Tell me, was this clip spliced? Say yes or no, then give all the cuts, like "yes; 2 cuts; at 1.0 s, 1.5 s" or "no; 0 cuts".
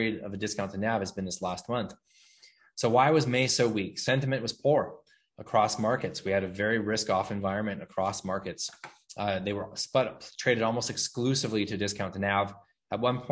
no; 0 cuts